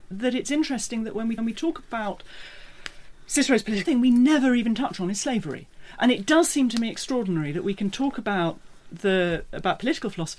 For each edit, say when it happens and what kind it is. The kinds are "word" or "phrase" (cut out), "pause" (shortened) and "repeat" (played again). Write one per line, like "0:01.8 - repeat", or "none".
0:01.4 - repeat
0:03.8 - phrase